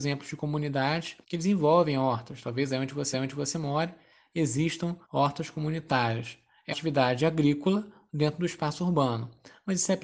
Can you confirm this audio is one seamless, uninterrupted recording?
no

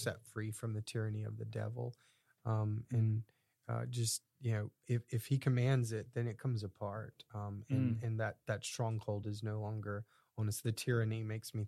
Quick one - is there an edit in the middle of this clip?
no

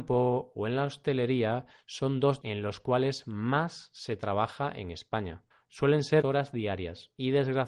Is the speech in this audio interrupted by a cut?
yes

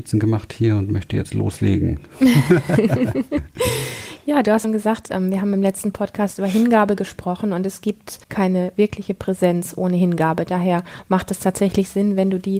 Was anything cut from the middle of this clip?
yes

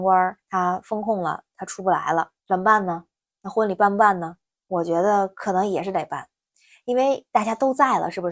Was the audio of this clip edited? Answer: yes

